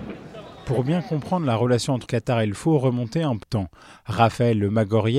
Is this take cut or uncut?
cut